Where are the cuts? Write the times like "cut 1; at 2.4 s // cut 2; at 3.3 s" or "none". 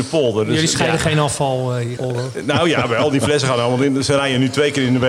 cut 1; at 2.0 s